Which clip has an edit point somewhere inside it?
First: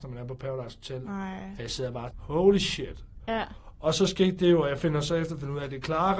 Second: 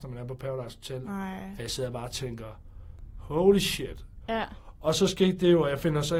first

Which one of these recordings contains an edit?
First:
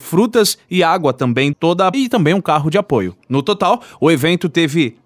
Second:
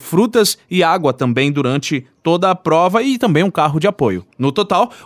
first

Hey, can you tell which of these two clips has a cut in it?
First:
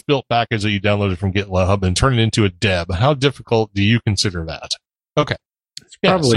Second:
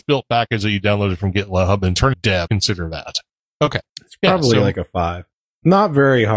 second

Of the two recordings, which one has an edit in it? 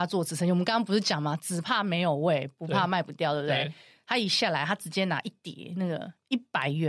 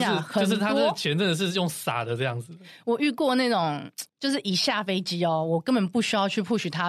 second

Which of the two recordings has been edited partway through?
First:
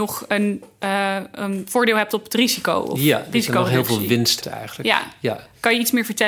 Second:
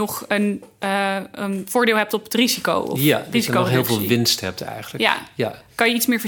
first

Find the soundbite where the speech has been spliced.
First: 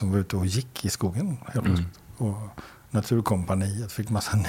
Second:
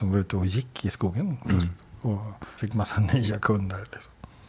second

